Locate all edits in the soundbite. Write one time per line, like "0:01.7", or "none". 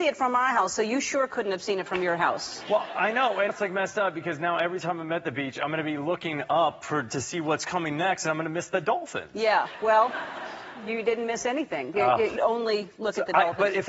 0:03.5
0:12.4